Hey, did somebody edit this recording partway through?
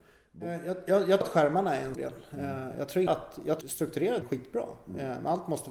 yes; 5 cuts; at 1.2 s, 1.9 s, 3.1 s, 3.6 s, 4.2 s

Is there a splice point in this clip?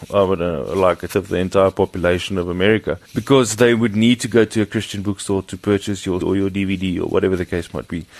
yes; 3 cuts; at 1.1 s, 3.0 s, 6.2 s

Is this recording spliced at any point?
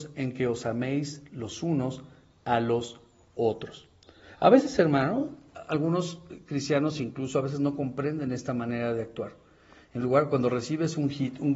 no; 0 cuts

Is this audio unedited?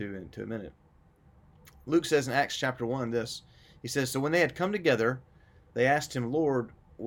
yes; 0 cuts

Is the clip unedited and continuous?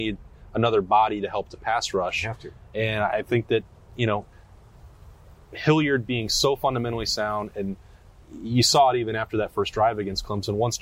yes; 0 cuts

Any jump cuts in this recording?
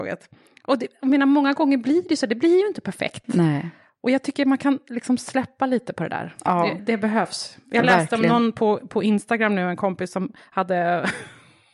yes; 1 cut; at 6.8 s

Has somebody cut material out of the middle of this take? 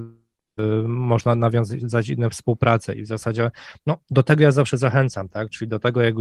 no; 0 cuts

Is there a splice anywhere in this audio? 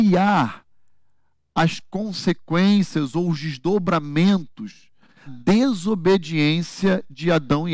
yes; 1 cut; at 5.3 s

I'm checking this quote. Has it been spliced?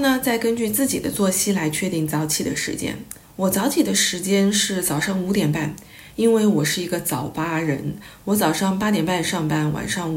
yes; 1 cut; at 3.2 s

